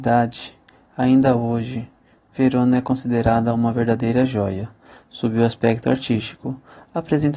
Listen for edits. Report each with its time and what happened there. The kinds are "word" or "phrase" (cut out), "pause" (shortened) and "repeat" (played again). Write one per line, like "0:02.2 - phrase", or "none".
none